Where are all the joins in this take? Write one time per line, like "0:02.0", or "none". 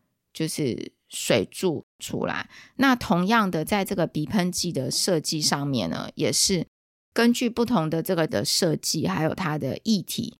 0:08.3